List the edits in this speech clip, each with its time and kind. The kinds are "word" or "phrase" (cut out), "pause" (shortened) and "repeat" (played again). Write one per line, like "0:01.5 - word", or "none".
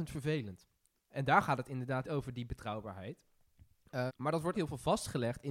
0:02.0 - word
0:04.1 - word
0:04.5 - word